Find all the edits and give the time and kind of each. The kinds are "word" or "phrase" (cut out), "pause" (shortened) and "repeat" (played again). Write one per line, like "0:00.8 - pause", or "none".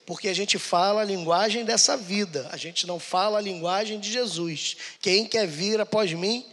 0:05.0 - pause